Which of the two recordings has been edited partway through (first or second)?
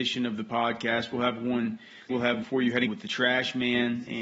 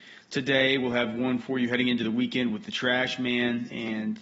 first